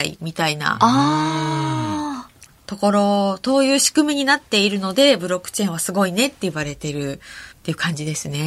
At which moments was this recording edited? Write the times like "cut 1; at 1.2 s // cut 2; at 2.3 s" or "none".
cut 1; at 2.5 s // cut 2; at 7.5 s